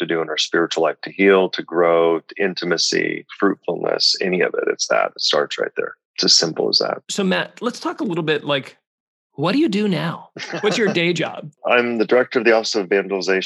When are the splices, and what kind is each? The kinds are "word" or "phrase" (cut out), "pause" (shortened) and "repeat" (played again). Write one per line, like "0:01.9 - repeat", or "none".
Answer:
none